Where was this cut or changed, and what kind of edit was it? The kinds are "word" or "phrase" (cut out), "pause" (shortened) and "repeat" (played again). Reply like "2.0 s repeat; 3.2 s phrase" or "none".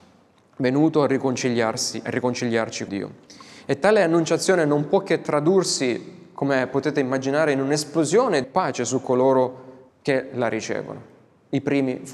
2.9 s word; 8.4 s phrase; 9.9 s pause